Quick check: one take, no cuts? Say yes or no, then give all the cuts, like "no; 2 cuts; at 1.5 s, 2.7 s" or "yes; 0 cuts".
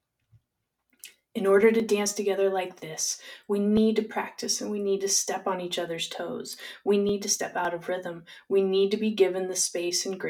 yes; 0 cuts